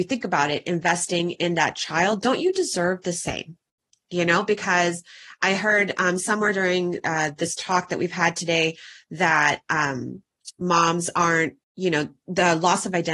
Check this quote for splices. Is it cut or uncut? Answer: cut